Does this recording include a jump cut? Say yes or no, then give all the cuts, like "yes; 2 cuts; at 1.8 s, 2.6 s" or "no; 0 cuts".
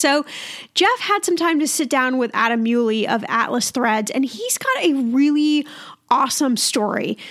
no; 0 cuts